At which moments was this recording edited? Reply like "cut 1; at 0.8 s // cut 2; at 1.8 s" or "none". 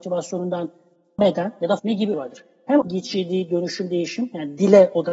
cut 1; at 1.2 s // cut 2; at 1.8 s // cut 3; at 2.1 s // cut 4; at 2.8 s